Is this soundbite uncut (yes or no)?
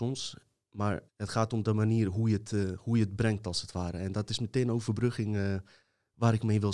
no